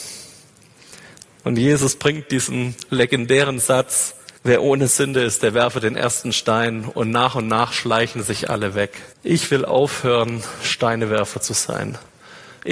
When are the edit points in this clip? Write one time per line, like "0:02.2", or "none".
0:04.4
0:09.1